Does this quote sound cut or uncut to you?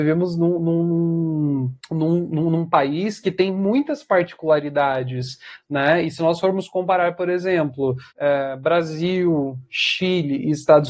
cut